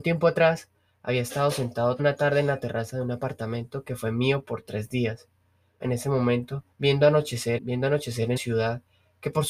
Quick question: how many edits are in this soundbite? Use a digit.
5